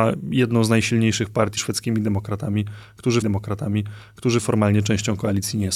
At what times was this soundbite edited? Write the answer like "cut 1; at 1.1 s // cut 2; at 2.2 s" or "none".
cut 1; at 1.6 s // cut 2; at 3.2 s